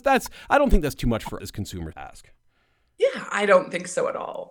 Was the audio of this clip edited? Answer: yes; 2 cuts; at 1.4 s, 1.9 s

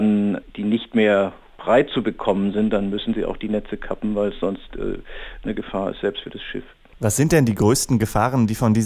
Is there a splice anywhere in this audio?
no; 0 cuts

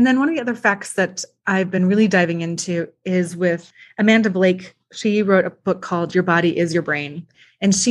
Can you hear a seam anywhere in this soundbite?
no; 0 cuts

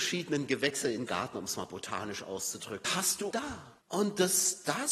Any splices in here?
yes; 4 cuts; at 1.1 s, 2.8 s, 3.3 s, 3.8 s

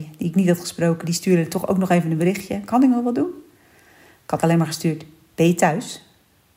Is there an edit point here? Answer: yes; 1 cut; at 4.4 s

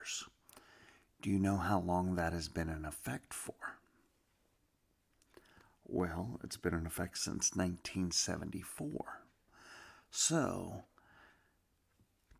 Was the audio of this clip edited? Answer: no; 0 cuts

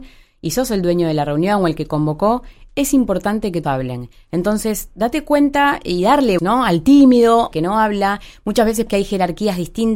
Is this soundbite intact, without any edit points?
no; 4 cuts; at 3.6 s, 6.4 s, 7.5 s, 8.9 s

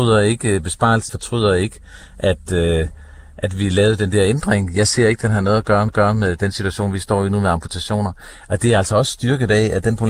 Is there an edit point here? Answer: yes; 2 cuts; at 1.1 s, 5.9 s

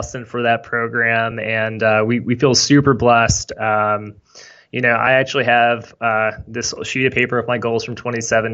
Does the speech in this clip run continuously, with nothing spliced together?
yes; 0 cuts

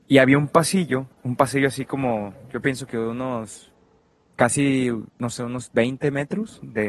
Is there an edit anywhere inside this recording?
yes; 2 cuts; at 1.1 s, 5.1 s

